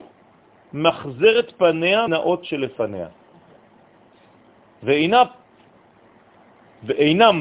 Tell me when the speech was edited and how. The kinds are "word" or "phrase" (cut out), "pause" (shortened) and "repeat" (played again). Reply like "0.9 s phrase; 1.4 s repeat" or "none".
2.1 s word